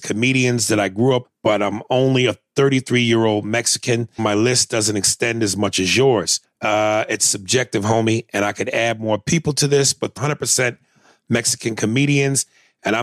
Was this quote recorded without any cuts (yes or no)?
no